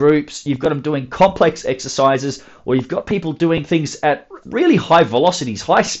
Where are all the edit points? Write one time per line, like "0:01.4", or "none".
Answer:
0:04.4